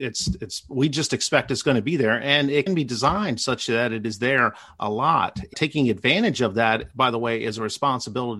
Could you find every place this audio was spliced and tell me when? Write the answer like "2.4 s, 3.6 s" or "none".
2.7 s, 5.5 s